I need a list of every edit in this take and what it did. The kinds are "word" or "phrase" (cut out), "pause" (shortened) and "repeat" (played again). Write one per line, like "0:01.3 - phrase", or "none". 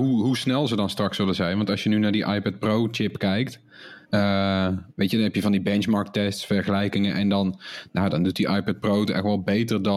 0:04.0 - pause